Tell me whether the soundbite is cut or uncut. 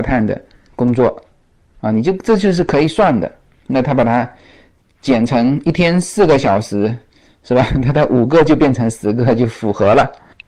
uncut